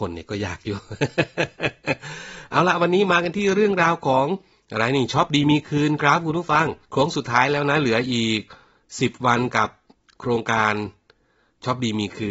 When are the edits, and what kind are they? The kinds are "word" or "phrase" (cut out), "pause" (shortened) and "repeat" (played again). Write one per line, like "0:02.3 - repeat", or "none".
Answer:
0:06.8 - pause